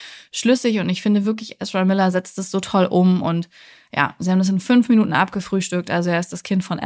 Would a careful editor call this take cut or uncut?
uncut